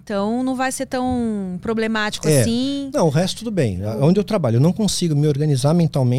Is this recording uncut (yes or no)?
yes